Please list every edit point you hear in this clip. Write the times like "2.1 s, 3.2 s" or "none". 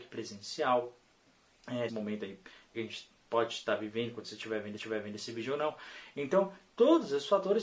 1.9 s, 2.7 s, 4.8 s